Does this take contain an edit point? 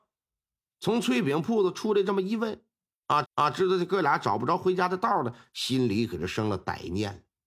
yes; 1 cut; at 3.2 s

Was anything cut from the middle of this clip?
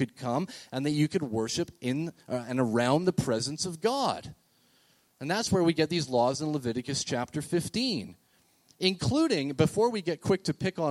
no; 0 cuts

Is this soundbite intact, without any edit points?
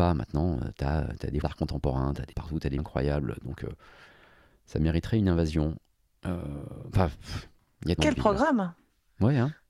no; 4 cuts; at 1.4 s, 2.3 s, 2.8 s, 8.0 s

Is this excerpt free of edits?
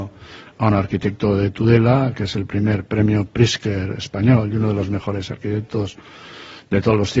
yes; 0 cuts

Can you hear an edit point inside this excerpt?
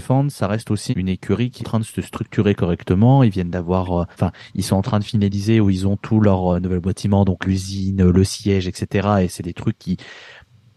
yes; 4 cuts; at 0.9 s, 1.6 s, 4.1 s, 7.4 s

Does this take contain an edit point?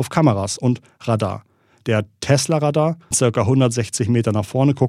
yes; 1 cut; at 3.1 s

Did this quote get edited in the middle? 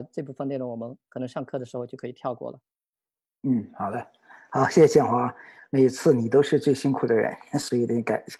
no; 0 cuts

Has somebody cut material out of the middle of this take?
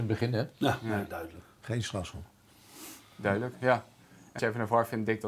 yes; 1 cut; at 4.4 s

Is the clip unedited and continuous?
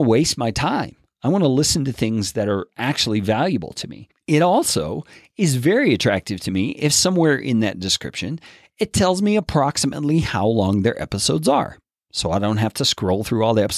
yes; 0 cuts

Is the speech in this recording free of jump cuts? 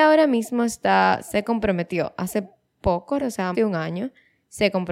no; 2 cuts; at 3.2 s, 3.5 s

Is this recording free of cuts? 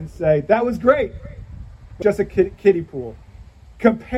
no; 1 cut; at 2.0 s

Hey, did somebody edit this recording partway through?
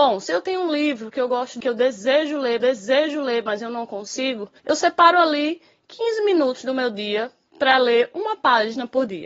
yes; 3 cuts; at 1.6 s, 2.6 s, 4.6 s

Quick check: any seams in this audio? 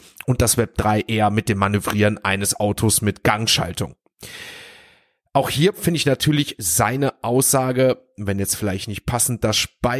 no; 0 cuts

